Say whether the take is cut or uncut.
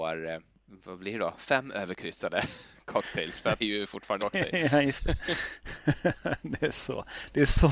cut